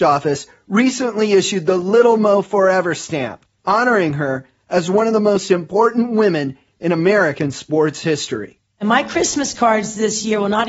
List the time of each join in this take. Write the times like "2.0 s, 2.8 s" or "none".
none